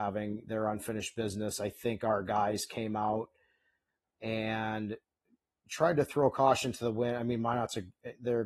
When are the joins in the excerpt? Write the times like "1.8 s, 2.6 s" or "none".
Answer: none